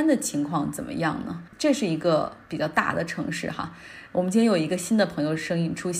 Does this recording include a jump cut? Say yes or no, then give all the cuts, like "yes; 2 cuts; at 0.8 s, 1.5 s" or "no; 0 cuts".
yes; 1 cut; at 1.5 s